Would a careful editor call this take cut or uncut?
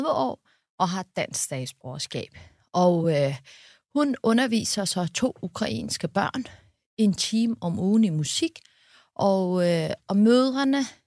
uncut